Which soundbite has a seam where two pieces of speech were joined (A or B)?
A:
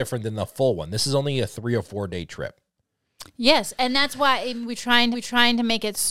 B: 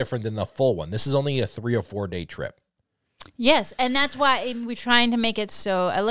A